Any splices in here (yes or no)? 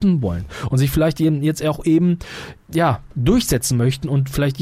yes